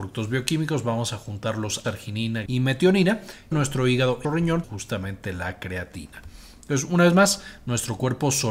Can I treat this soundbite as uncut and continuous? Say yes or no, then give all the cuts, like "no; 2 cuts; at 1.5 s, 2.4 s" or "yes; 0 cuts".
no; 5 cuts; at 1.8 s, 2.5 s, 3.5 s, 4.2 s, 4.6 s